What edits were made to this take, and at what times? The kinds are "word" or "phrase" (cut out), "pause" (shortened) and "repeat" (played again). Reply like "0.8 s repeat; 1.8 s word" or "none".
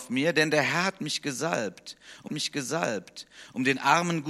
2.3 s repeat